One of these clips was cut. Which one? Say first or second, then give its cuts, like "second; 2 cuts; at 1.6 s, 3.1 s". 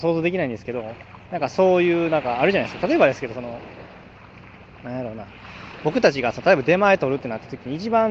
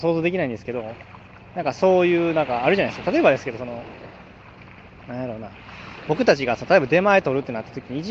first; 1 cut; at 1.2 s